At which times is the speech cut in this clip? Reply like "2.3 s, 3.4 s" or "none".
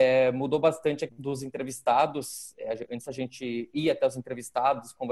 1.1 s